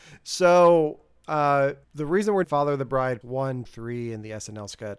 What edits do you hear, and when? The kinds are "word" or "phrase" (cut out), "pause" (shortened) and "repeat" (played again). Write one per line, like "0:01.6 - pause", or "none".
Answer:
0:01.8 - pause
0:02.4 - word
0:03.2 - word
0:03.6 - word